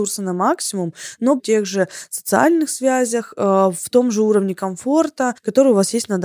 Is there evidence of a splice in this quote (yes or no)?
yes